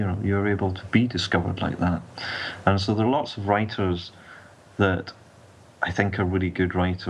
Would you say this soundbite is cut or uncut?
uncut